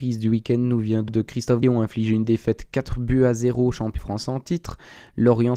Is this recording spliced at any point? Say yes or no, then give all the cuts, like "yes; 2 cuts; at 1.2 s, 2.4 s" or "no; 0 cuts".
yes; 3 cuts; at 1.1 s, 1.6 s, 4.0 s